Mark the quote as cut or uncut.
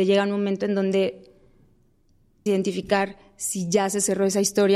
cut